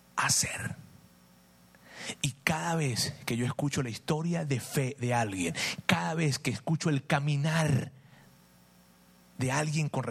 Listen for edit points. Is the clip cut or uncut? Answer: uncut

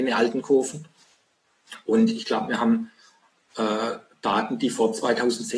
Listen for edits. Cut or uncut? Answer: uncut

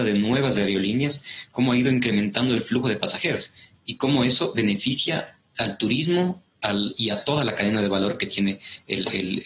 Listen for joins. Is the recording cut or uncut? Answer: uncut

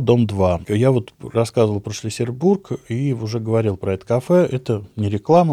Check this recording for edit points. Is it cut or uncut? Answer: uncut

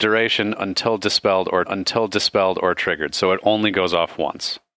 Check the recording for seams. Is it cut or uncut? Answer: cut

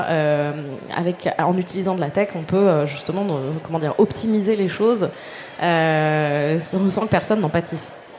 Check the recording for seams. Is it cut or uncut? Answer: uncut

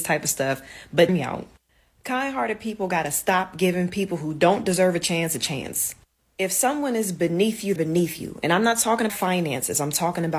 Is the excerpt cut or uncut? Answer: cut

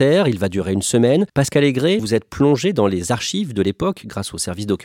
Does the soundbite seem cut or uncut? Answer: cut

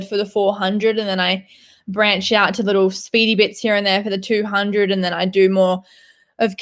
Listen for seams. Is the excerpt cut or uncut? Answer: uncut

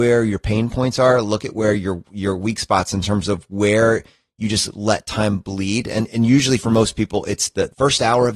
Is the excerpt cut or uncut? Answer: uncut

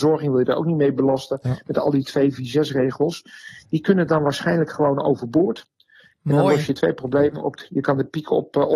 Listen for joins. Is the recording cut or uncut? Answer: uncut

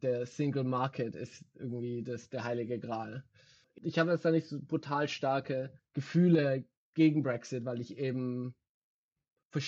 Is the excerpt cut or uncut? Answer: cut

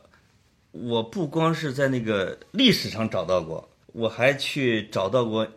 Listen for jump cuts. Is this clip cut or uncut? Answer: cut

